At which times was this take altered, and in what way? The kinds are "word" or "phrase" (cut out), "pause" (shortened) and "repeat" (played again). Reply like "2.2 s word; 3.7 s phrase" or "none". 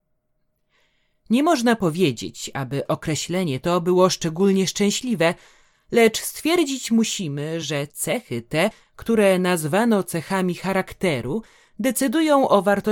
none